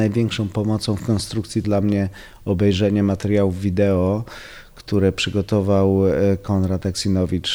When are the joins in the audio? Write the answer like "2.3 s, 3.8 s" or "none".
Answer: 1.6 s